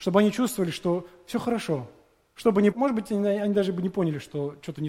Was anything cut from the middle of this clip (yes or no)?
yes